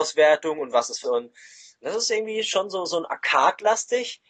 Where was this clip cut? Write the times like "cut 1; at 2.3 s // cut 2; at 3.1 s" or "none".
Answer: cut 1; at 1.0 s

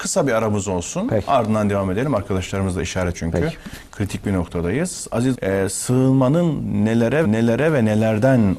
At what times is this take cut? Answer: cut 1; at 3.1 s // cut 2; at 5.3 s // cut 3; at 7.2 s

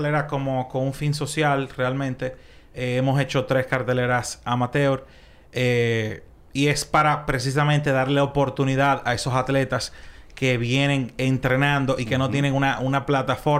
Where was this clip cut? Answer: none

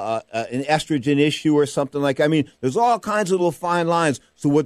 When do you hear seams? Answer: none

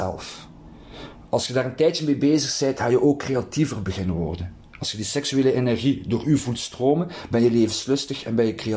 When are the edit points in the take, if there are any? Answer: none

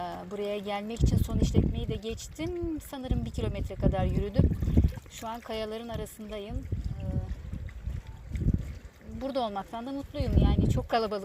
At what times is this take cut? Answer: none

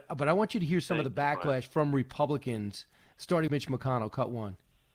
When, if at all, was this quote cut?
cut 1; at 3.5 s

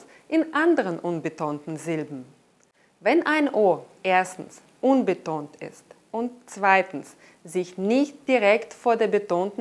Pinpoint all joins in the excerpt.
none

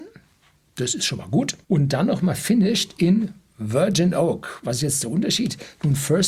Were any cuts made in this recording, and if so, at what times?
cut 1; at 1.6 s

